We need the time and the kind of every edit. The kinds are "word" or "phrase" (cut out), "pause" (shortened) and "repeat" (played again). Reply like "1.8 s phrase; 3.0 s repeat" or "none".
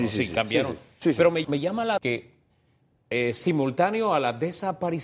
1.4 s word; 2.0 s word